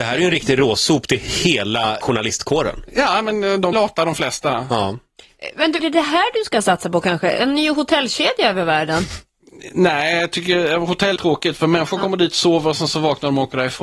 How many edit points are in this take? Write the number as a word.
four